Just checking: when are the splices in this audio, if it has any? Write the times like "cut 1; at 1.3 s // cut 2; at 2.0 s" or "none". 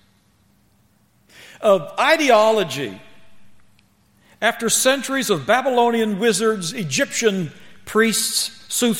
none